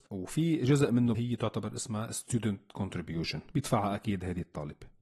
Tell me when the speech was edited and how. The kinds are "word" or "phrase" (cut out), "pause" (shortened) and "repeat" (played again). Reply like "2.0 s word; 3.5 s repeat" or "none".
1.1 s word